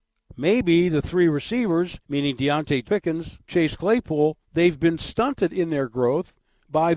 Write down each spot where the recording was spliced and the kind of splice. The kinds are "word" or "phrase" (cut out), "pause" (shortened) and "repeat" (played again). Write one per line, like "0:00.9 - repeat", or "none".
0:02.0 - pause
0:02.8 - phrase
0:03.4 - pause
0:04.4 - pause